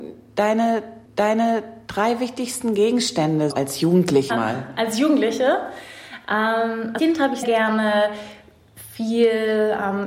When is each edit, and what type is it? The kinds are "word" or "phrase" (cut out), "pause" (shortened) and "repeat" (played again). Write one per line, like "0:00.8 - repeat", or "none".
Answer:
0:01.0 - repeat
0:03.5 - word
0:04.3 - phrase
0:07.0 - word
0:07.4 - word

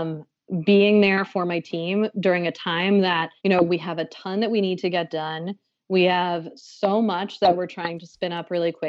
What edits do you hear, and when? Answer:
0:03.4 - pause

